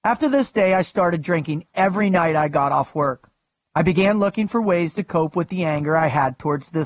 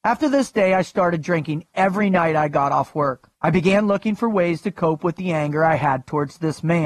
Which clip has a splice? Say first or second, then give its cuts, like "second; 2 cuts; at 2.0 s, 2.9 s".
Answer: second; 1 cut; at 3.3 s